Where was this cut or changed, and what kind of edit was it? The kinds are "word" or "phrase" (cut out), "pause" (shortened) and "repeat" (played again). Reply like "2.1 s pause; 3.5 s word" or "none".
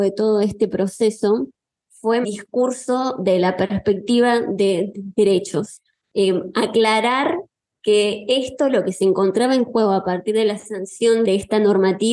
2.2 s phrase